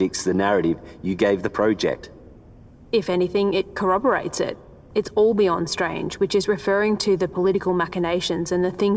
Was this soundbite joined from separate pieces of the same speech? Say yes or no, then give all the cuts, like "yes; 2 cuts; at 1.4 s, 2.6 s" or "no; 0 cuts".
no; 0 cuts